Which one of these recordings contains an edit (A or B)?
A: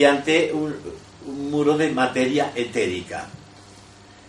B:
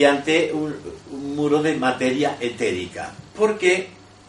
B